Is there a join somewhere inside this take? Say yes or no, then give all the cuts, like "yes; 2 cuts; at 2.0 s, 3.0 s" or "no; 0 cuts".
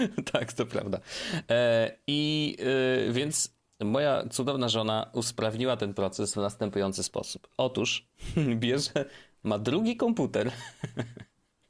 no; 0 cuts